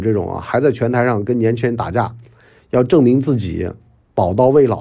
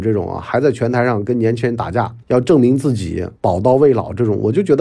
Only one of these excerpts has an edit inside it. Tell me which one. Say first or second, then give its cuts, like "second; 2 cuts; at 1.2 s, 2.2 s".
second; 2 cuts; at 2.2 s, 3.4 s